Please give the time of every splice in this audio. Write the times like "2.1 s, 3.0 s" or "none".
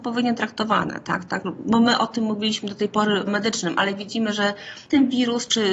3.3 s